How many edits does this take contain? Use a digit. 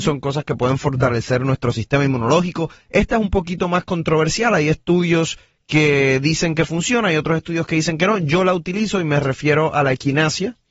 0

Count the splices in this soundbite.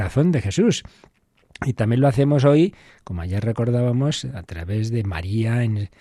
0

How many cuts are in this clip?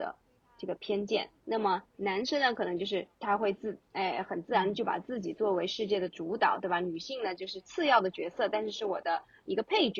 3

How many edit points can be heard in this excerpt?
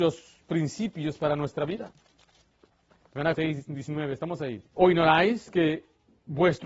2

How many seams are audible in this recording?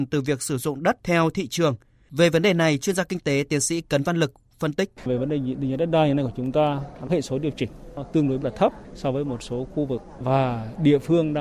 3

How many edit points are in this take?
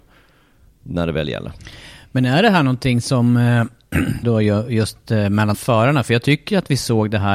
2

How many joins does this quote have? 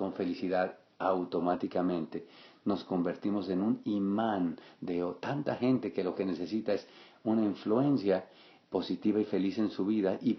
0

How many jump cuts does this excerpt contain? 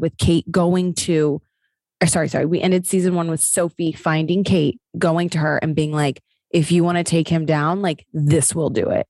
0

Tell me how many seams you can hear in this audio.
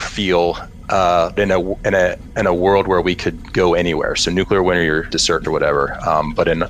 3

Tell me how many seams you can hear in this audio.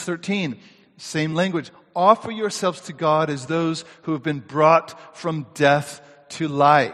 0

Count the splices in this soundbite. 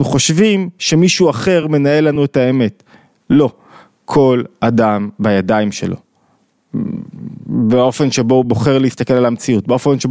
0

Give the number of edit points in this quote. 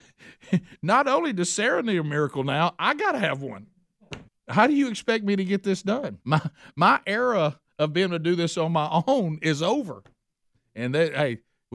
2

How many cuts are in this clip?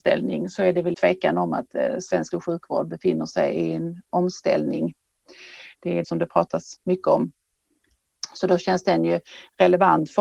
3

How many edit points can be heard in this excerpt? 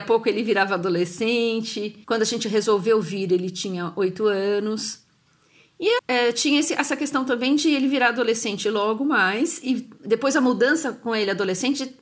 2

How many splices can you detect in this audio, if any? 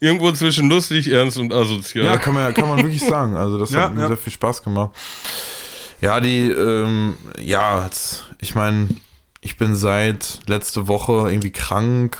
0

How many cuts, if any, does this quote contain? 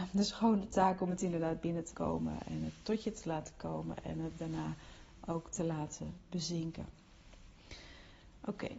1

